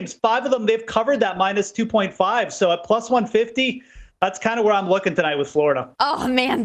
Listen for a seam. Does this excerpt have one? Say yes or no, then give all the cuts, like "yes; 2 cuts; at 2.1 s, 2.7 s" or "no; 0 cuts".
no; 0 cuts